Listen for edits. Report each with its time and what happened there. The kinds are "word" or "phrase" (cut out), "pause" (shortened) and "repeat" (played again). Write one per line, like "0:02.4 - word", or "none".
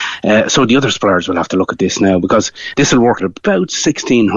0:03.2 - word